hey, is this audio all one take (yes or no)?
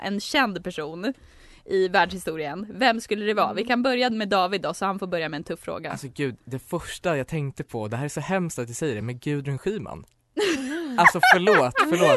yes